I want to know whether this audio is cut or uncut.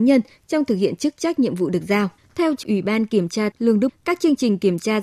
cut